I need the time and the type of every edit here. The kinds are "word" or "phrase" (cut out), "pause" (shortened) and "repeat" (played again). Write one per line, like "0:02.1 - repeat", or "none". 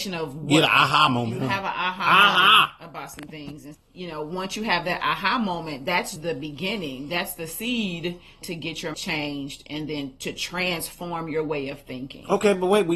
0:03.7 - word
0:06.2 - word
0:08.4 - phrase
0:08.9 - word